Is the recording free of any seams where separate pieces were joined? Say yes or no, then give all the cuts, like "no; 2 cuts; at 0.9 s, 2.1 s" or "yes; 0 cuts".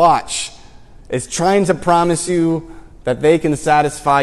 yes; 0 cuts